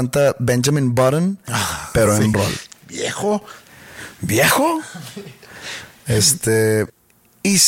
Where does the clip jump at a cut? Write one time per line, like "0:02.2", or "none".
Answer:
0:02.3